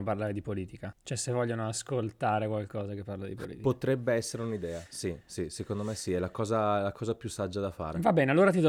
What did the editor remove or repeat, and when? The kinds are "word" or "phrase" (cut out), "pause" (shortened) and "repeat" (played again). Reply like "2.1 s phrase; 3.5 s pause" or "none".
none